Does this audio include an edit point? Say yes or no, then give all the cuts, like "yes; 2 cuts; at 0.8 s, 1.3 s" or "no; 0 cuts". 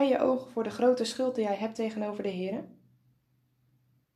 no; 0 cuts